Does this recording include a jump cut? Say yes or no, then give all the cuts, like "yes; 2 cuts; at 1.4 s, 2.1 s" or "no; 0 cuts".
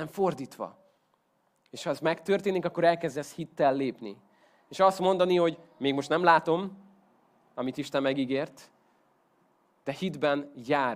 no; 0 cuts